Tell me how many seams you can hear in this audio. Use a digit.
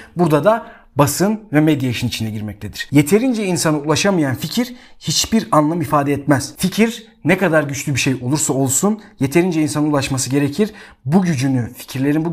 0